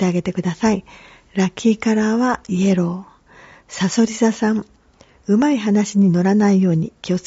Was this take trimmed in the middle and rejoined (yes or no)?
no